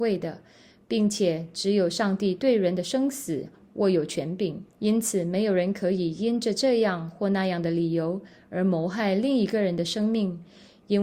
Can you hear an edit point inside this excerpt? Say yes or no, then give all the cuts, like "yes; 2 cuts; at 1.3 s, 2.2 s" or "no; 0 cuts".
yes; 1 cut; at 4.7 s